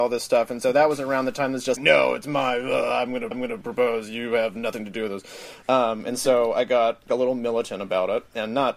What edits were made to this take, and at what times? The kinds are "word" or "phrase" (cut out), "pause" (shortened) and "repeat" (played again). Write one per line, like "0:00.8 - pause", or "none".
0:01.8 - word
0:03.3 - repeat
0:05.6 - pause
0:07.1 - word